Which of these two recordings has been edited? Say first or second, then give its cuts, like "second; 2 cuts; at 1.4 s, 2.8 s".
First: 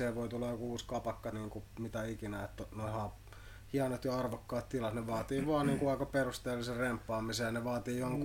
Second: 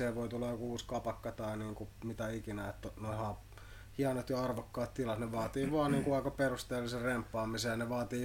first; 1 cut; at 1.3 s